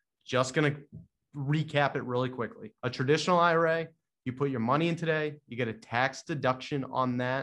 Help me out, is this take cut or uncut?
cut